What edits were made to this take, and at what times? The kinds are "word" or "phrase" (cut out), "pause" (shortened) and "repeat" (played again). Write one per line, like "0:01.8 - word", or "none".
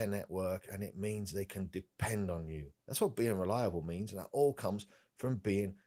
0:02.8 - pause